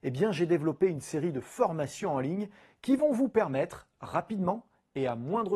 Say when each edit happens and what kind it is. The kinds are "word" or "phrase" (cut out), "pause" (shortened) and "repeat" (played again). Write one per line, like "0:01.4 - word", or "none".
none